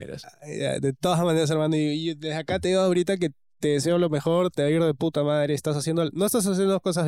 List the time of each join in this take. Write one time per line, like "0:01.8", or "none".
none